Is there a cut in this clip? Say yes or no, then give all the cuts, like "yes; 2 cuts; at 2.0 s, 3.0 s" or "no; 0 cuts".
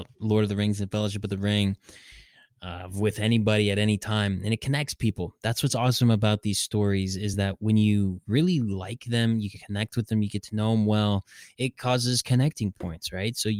no; 0 cuts